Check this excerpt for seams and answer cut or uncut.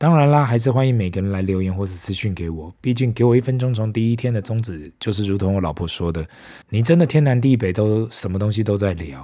cut